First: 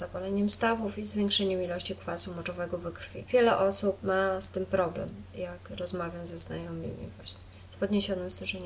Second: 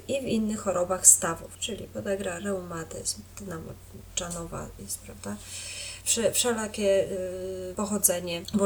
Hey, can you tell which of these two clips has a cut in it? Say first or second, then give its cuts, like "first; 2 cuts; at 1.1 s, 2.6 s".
second; 1 cut; at 4.8 s